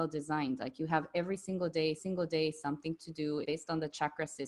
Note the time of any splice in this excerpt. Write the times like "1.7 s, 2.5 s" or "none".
2.0 s, 3.4 s